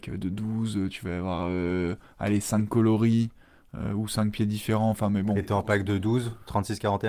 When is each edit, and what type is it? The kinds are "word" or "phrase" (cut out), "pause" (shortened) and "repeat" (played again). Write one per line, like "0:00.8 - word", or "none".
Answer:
none